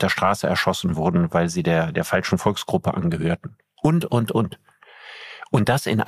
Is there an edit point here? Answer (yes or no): no